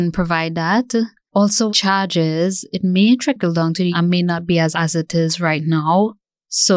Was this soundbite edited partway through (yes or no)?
yes